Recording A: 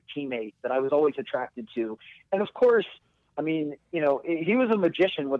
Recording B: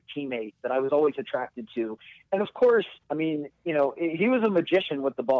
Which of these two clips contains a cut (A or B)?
B